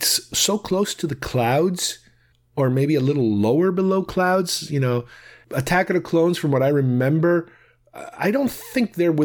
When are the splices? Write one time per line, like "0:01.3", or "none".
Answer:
none